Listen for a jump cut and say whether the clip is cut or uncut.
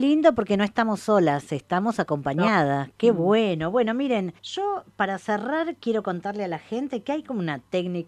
cut